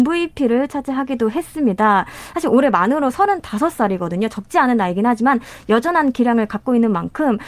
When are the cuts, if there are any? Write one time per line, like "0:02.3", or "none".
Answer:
none